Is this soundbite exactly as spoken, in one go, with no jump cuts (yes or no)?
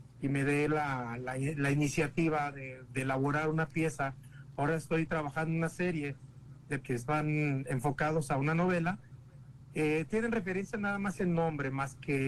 no